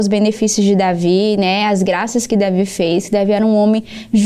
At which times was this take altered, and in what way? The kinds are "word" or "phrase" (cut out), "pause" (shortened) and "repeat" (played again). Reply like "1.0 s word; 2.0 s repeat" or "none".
none